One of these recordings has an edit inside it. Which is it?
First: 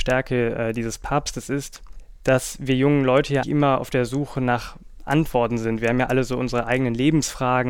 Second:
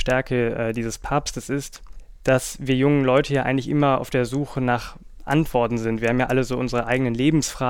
first; 1 cut; at 3.4 s

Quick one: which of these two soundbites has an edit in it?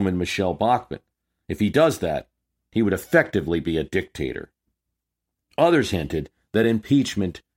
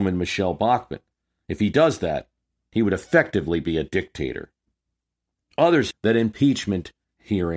second; 1 cut; at 5.9 s

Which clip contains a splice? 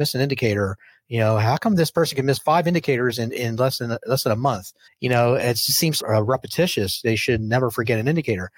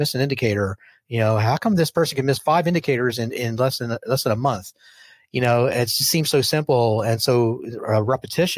first; 2 cuts; at 4.9 s, 6.0 s

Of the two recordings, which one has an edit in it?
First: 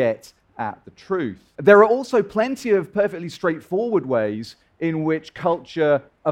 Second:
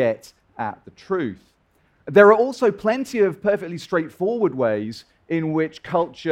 first; 1 cut; at 1.5 s

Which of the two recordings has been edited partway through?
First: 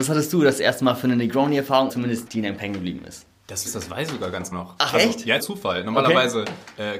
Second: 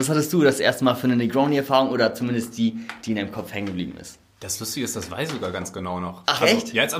first; 6 cuts; at 1.9 s, 2.3 s, 2.6 s, 3.7 s, 4.5 s, 5.4 s

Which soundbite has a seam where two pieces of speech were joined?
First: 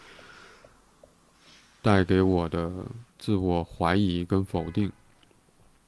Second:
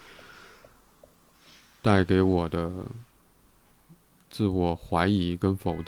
first; 1 cut; at 3.1 s

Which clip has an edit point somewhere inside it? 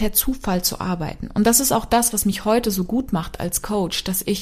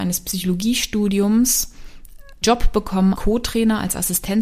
second; 2 cuts; at 2.4 s, 3.2 s

